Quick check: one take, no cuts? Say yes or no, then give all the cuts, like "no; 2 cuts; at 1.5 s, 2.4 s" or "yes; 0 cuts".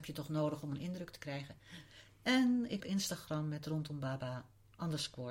no; 1 cut; at 2.8 s